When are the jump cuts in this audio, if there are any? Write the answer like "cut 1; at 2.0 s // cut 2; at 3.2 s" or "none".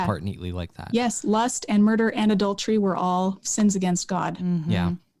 none